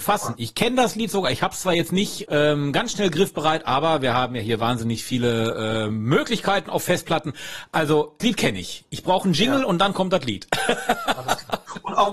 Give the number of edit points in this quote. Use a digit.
2